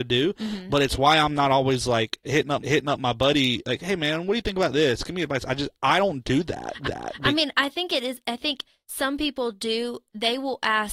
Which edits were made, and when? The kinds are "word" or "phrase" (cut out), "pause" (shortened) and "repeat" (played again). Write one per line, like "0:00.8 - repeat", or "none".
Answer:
0:02.6 - repeat
0:06.8 - repeat